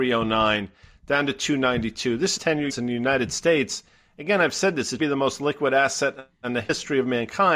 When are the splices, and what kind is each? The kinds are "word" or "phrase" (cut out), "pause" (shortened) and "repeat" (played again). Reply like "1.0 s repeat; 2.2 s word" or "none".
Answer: 2.4 s word; 2.7 s word; 5.0 s word

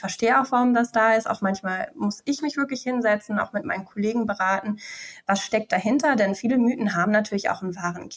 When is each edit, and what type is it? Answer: none

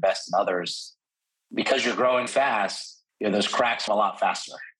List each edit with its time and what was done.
1.2 s pause; 2.3 s word; 3.1 s pause; 3.9 s word

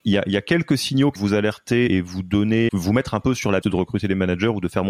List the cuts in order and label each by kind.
1.2 s word; 1.9 s word; 2.7 s word; 3.6 s word

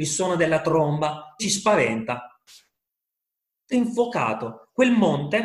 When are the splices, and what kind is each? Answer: 1.4 s word; 3.7 s word

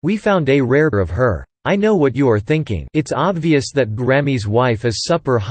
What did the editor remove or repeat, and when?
0.9 s word; 1.5 s pause; 2.9 s pause; 4.0 s word

